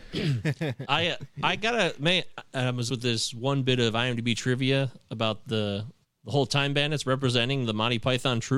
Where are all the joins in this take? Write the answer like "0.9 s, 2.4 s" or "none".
2.9 s, 6.0 s

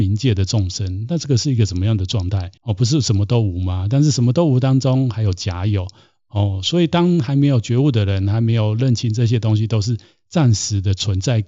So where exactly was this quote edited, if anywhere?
2.6 s

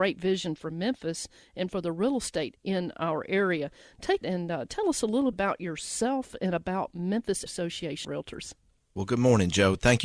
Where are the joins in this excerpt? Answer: 2.6 s, 4.2 s, 5.3 s, 7.5 s, 8.0 s

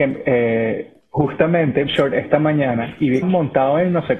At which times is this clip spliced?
1.9 s, 3.2 s

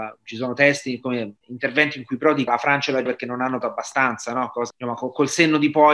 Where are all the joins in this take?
1.4 s, 2.5 s, 3.1 s, 3.6 s, 4.7 s

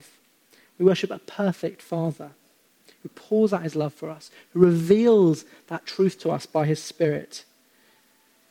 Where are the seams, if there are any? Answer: none

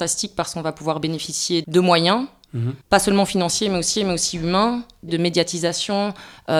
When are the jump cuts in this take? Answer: 1.6 s, 2.8 s, 4.0 s, 5.1 s

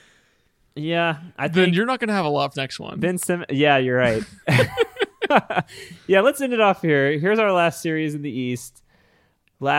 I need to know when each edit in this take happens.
2.5 s

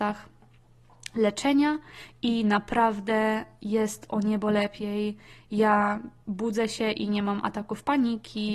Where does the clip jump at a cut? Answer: none

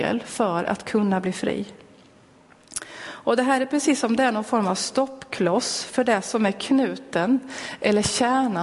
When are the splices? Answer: none

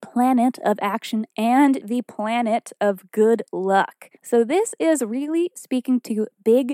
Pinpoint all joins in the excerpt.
1.8 s, 4.2 s

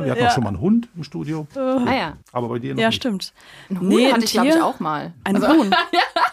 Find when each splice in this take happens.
2.2 s

